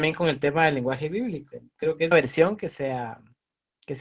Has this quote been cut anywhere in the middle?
yes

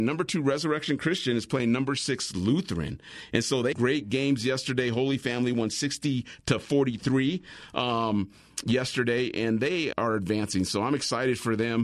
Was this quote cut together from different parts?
yes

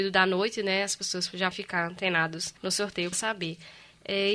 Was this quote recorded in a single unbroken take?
no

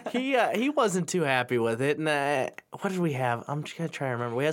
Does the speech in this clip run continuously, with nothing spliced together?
yes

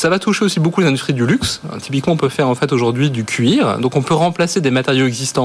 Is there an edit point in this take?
no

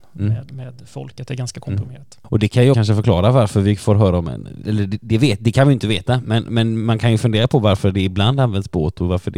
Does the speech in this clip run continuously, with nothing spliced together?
no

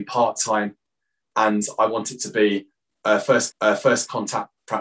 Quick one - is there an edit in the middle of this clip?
yes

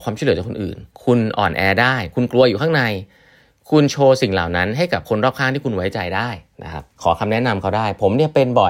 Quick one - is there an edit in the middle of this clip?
yes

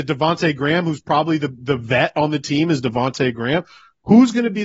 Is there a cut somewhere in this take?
no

